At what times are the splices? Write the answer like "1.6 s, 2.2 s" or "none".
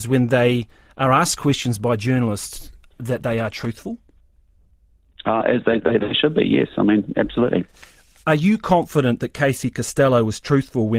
none